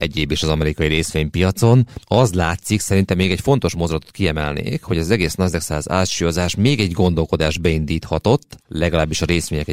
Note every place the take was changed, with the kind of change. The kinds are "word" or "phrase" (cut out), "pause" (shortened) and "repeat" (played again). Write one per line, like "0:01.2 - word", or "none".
none

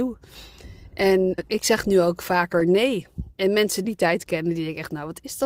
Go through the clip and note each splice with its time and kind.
0:01.4 - word
0:03.3 - pause
0:03.8 - phrase

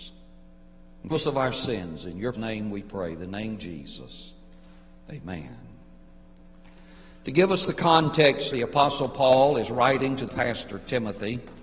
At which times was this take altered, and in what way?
0:01.1 - word
0:02.3 - word
0:08.5 - word
0:10.3 - word

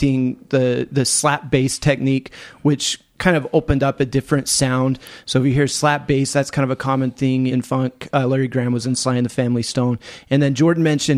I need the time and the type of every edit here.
0:07.5 - word

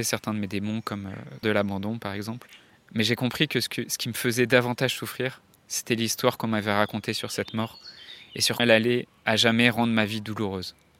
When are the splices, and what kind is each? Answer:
0:01.4 - phrase
0:02.7 - pause
0:08.6 - word

